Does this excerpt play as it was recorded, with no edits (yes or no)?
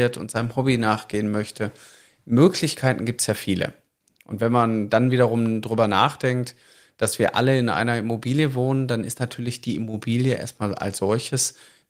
yes